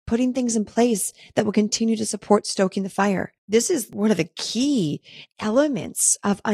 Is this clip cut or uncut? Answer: cut